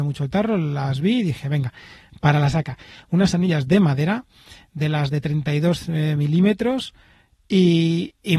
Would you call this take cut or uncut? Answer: uncut